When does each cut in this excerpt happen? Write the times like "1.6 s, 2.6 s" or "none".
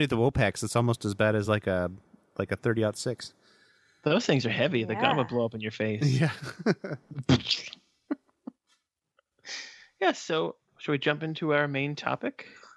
none